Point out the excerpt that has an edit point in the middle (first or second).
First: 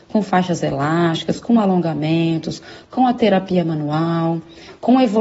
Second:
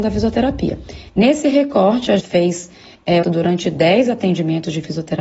second